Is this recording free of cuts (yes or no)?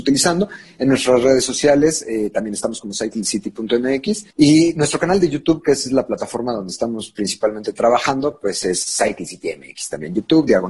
no